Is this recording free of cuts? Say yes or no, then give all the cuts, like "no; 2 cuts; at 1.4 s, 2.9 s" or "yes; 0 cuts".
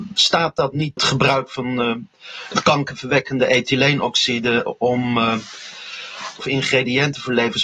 no; 2 cuts; at 1.0 s, 6.4 s